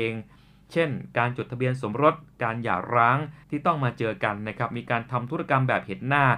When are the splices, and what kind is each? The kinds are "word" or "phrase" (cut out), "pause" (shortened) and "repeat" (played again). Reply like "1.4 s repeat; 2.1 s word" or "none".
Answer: 3.4 s pause